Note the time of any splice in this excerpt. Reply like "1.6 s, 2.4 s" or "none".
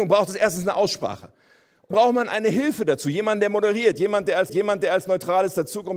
1.9 s, 4.5 s